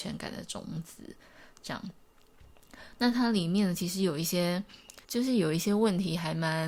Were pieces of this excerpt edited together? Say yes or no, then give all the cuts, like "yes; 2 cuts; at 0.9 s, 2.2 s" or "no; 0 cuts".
yes; 1 cut; at 5.0 s